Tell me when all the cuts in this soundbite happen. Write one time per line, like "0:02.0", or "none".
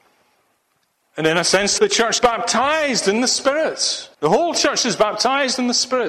0:01.8
0:02.2
0:04.1